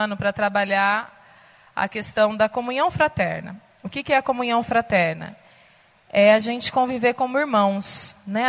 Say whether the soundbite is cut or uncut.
uncut